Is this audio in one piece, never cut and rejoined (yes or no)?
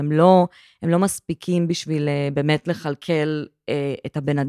yes